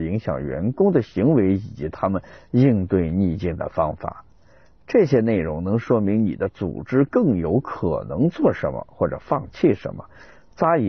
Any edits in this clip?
no; 0 cuts

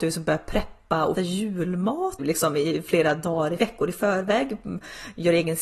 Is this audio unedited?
no; 3 cuts; at 1.1 s, 2.2 s, 3.6 s

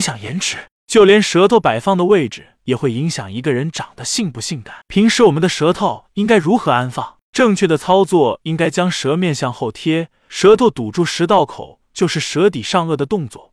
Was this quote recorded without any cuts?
no; 1 cut; at 4.8 s

